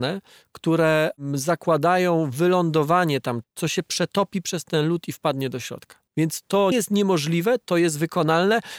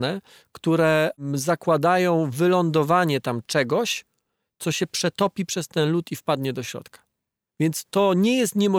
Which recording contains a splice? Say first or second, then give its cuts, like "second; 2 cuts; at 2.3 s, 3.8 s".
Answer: first; 3 cuts; at 3.4 s, 6.1 s, 6.7 s